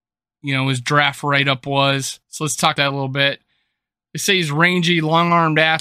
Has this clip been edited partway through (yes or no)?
yes